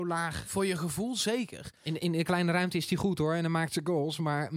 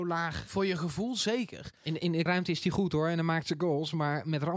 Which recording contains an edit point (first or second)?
second